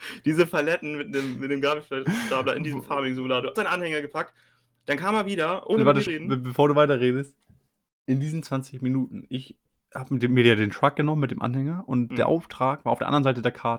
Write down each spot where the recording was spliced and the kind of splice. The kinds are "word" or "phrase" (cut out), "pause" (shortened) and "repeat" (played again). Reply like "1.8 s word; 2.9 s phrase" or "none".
3.6 s word; 6.1 s word